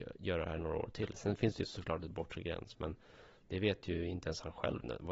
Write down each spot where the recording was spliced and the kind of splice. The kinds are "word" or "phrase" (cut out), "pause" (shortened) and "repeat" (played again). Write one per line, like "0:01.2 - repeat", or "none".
none